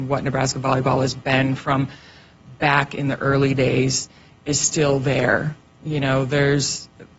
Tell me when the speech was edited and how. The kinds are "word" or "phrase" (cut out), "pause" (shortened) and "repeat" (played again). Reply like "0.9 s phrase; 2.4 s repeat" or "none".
none

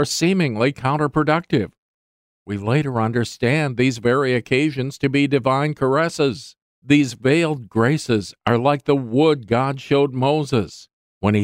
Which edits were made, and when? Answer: none

